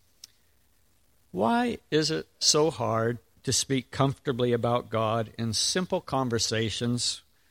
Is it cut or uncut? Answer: uncut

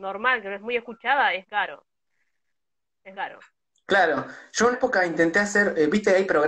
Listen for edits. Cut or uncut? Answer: cut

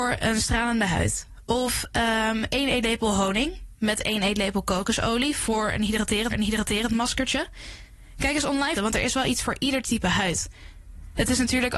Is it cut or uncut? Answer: cut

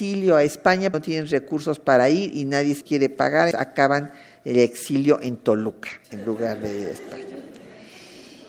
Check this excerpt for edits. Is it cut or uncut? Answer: cut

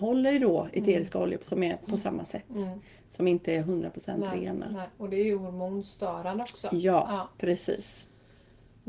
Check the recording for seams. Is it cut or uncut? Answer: uncut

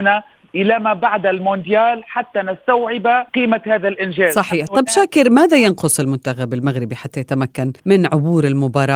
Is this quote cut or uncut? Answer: cut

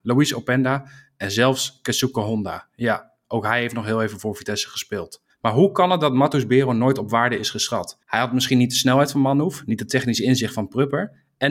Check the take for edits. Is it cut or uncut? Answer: cut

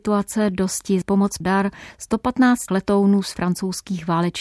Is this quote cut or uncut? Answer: cut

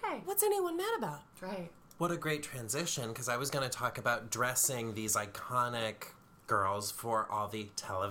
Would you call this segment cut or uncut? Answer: uncut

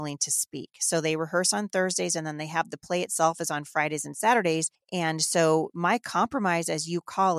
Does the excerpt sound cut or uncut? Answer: cut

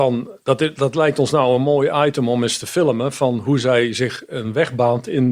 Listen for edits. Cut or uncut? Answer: uncut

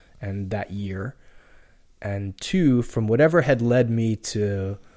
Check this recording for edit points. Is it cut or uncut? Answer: uncut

